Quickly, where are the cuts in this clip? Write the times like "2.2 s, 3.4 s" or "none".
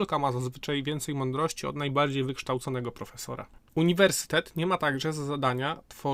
3.7 s